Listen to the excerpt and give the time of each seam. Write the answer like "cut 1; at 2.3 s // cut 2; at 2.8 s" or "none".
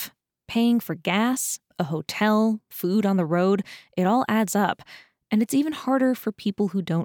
none